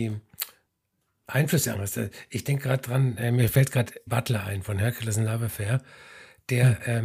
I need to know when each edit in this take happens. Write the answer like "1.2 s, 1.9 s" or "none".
1.7 s, 4.1 s